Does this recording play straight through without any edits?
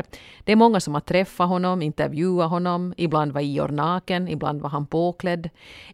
yes; 0 cuts

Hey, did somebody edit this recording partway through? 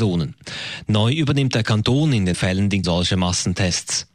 yes; 2 cuts; at 2.3 s, 2.8 s

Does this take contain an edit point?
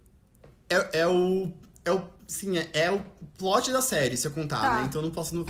no; 0 cuts

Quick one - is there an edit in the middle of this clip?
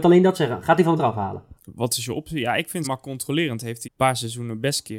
yes; 4 cuts; at 1.0 s, 1.6 s, 2.8 s, 3.8 s

